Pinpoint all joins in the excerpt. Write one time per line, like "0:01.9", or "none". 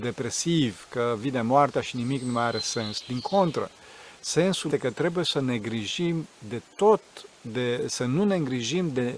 0:04.7

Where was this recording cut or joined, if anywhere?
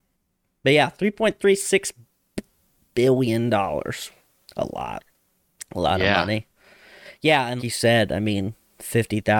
0:07.6

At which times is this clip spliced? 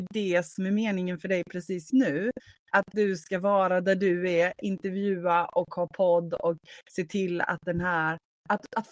0:01.9
0:02.9

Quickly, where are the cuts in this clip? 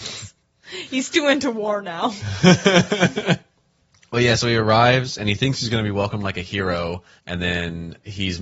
none

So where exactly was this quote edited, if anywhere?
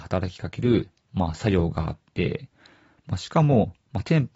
none

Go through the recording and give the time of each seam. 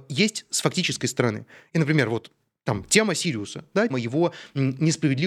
0:03.9

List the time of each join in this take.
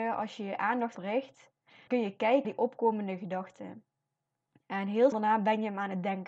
0:00.9
0:01.9
0:02.4
0:05.1

